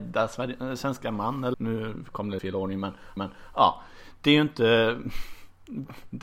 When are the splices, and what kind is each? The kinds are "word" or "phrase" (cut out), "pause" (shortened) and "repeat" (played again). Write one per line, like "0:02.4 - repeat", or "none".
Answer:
0:01.5 - word
0:02.4 - word
0:03.2 - repeat

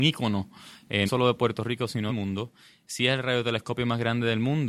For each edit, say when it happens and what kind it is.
0:01.1 - word
0:02.1 - word

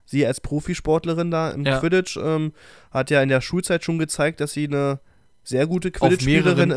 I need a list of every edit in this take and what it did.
none

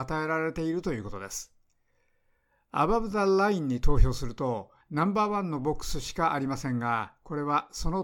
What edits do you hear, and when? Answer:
0:04.8 - pause

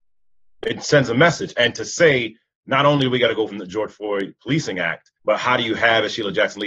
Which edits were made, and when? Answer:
0:03.5 - word
0:05.2 - pause

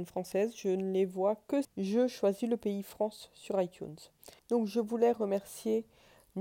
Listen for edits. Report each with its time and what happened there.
0:01.6 - word
0:04.4 - pause

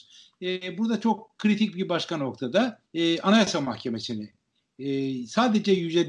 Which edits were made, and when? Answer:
0:02.9 - pause

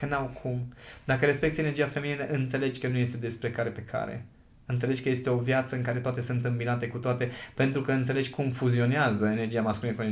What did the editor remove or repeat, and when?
none

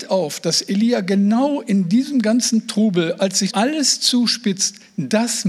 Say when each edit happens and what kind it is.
0:03.5 - word

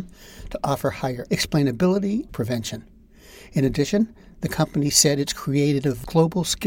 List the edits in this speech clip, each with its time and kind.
0:01.3 - phrase
0:02.3 - phrase

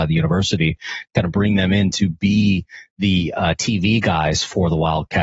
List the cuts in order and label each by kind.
none

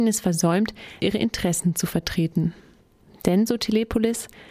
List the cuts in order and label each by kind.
0:01.0 - word

